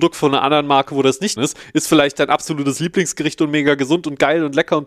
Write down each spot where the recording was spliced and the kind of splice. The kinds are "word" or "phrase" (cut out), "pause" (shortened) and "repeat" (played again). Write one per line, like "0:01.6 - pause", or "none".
0:01.4 - word